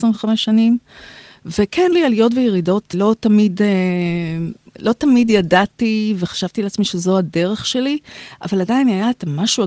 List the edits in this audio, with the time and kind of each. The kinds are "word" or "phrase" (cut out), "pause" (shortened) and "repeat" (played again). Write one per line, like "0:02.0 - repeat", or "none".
0:01.9 - word
0:02.9 - word

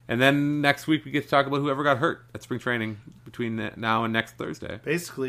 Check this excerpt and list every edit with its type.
0:03.2 - pause

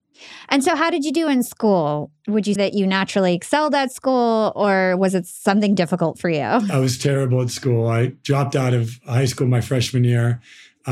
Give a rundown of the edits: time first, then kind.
0:02.6 - word
0:05.8 - word

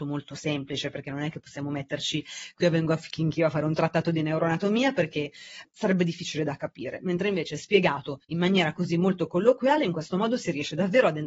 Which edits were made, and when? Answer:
0:05.6 - word
0:08.2 - pause

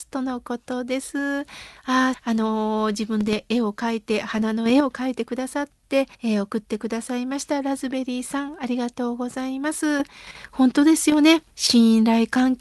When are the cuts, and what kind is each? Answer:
0:02.1 - phrase
0:06.1 - pause
0:11.5 - pause

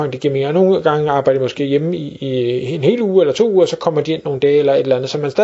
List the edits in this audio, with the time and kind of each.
none

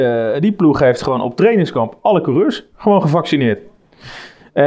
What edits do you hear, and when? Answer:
0:02.7 - pause

